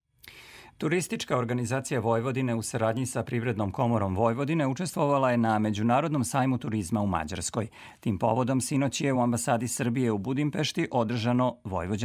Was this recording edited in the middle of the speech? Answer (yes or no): no